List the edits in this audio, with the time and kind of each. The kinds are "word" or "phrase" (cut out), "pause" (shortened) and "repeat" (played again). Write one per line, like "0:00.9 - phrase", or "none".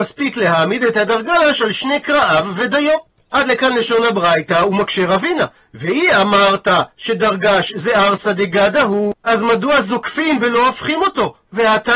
0:09.2 - pause